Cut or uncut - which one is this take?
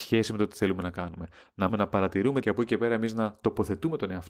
cut